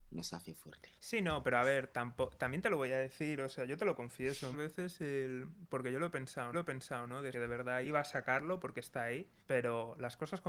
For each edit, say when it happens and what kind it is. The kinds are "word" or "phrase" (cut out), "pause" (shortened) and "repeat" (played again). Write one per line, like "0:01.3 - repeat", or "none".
0:01.0 - pause
0:04.5 - word
0:06.5 - repeat
0:07.3 - phrase
0:07.8 - word
0:09.4 - pause